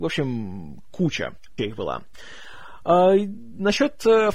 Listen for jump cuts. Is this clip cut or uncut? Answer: cut